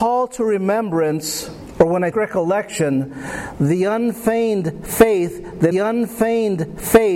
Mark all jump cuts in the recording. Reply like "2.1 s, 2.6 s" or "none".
2.1 s, 5.7 s